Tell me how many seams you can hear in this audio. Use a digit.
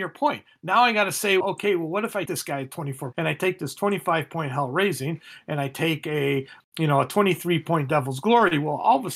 4